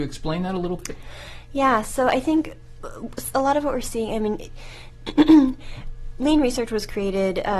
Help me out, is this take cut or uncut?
uncut